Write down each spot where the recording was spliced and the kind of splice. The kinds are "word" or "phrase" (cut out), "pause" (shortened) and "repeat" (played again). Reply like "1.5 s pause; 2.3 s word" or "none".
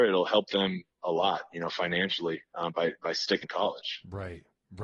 3.4 s word